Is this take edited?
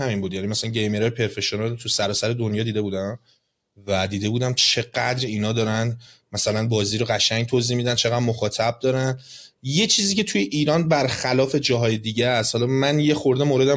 no; 0 cuts

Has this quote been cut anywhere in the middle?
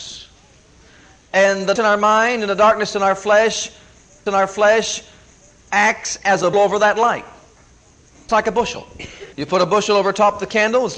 yes; 5 cuts; at 1.8 s, 4.3 s, 6.5 s, 8.3 s, 9.3 s

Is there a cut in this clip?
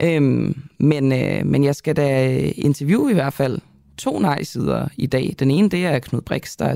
no; 0 cuts

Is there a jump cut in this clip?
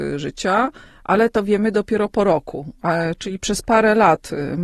no; 0 cuts

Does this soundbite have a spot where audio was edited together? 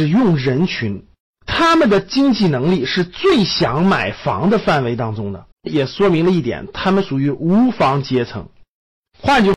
yes; 2 cuts; at 1.2 s, 5.5 s

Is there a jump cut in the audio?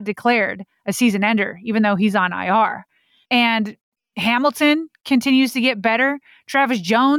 no; 0 cuts

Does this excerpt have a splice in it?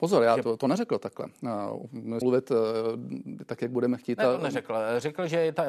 yes; 1 cut; at 2.2 s

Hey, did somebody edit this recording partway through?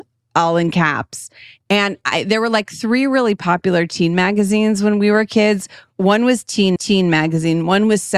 yes; 1 cut; at 6.8 s

